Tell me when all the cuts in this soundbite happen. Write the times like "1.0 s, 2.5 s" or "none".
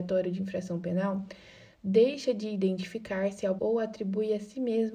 3.6 s